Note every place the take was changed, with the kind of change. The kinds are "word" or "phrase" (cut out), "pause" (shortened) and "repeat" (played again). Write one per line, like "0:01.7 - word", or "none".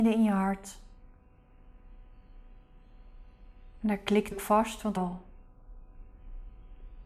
0:03.8 - pause
0:04.3 - word
0:05.0 - phrase